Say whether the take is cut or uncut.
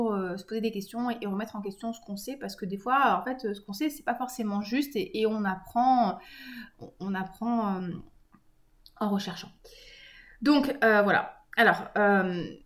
uncut